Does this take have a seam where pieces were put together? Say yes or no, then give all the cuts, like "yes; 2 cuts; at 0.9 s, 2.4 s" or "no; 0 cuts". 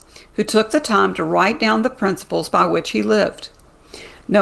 no; 0 cuts